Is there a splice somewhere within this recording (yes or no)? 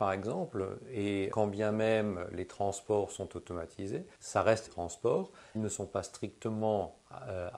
yes